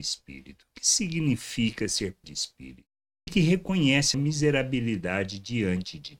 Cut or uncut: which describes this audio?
cut